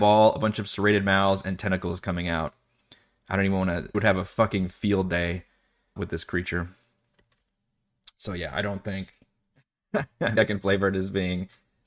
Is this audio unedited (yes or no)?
no